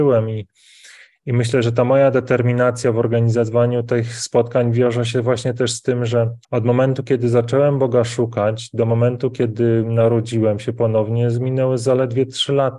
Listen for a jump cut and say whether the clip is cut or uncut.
cut